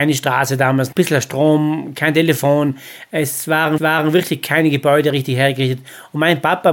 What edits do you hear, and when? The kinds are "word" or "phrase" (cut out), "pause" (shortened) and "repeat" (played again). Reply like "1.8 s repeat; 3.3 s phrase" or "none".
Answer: 0.9 s phrase; 3.8 s repeat